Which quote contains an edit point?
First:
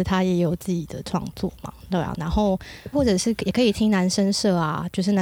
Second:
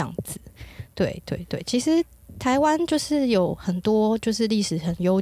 first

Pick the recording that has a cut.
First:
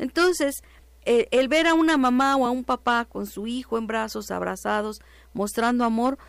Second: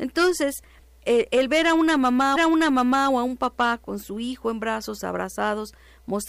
second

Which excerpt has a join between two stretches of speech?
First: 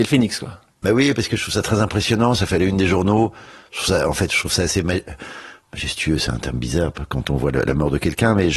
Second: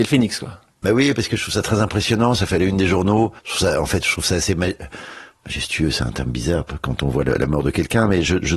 second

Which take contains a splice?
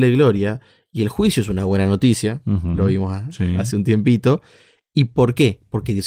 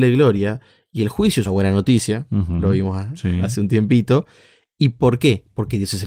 second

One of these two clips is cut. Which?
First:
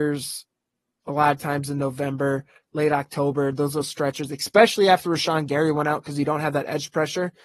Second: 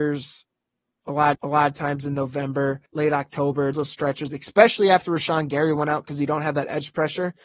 second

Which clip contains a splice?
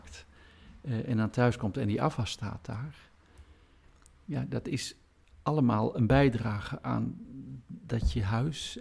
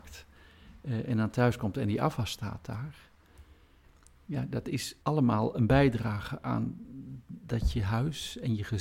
second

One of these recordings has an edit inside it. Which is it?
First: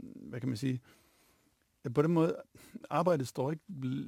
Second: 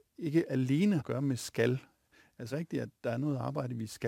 second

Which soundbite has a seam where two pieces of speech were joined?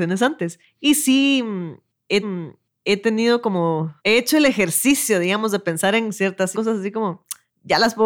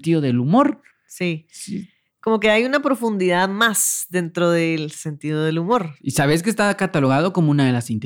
first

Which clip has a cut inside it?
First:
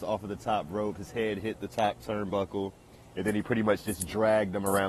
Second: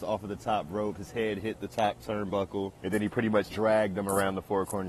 second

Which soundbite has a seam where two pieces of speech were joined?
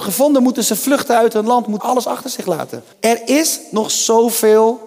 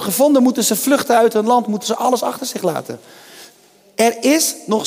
first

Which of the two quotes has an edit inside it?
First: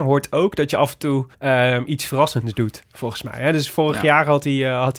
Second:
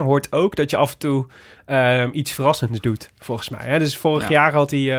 first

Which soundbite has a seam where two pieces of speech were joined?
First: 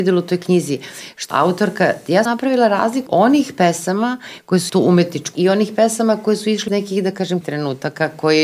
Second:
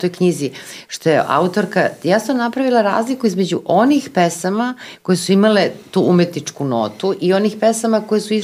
first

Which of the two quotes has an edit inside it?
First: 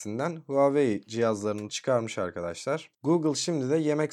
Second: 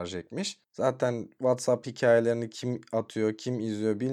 first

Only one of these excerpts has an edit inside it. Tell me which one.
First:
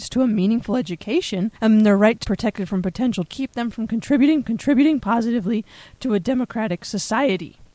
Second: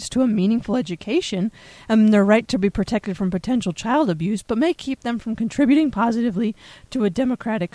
first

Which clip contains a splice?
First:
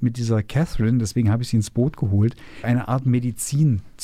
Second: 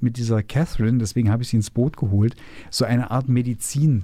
first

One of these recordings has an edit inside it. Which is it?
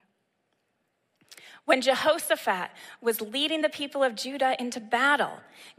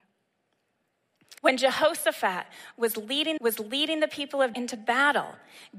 second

